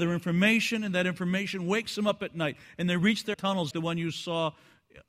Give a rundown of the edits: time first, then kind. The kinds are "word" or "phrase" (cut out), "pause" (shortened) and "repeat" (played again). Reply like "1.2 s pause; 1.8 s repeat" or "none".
3.3 s phrase; 3.7 s word